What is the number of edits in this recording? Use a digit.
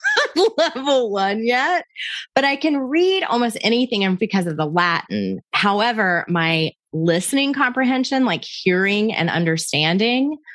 1